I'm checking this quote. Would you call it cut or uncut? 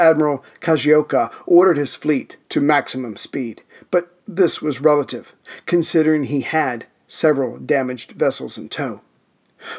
cut